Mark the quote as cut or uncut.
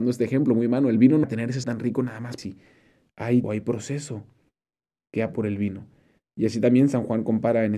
cut